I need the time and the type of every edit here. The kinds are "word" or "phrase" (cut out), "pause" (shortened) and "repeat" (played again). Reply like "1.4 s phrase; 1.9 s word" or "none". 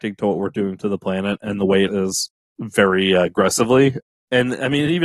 1.9 s phrase